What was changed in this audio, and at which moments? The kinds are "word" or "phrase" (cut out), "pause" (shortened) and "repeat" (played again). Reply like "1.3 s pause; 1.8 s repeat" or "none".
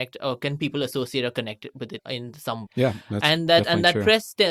2.0 s word; 2.7 s word

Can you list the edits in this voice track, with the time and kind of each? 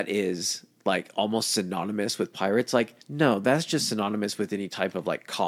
3.0 s pause

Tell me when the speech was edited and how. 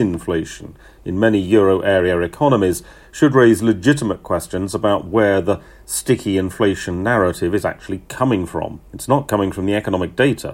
8.9 s pause

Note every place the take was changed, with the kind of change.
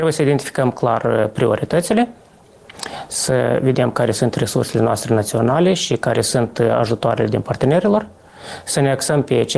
7.4 s word

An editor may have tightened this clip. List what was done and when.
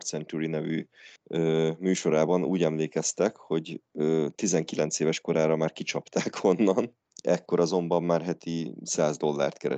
1.2 s pause; 7.1 s pause

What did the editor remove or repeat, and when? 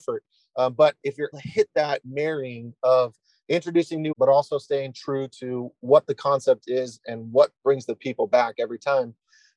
1.3 s word; 4.1 s word; 7.6 s word

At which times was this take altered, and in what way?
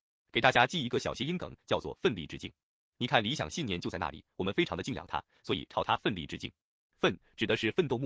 none

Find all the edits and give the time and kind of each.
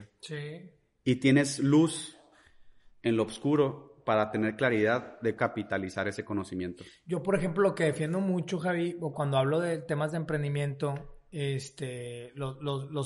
5.4 s word; 9.1 s word

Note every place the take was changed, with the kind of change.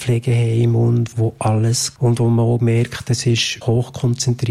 1.1 s word; 2.0 s word; 3.6 s word

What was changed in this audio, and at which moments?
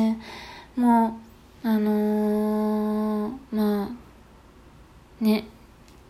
1.3 s pause

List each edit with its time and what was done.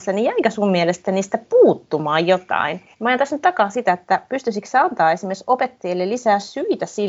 2.9 s pause

